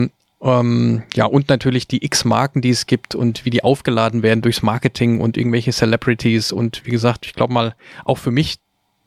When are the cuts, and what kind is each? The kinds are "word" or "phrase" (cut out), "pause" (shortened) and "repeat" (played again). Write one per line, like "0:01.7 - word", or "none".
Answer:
none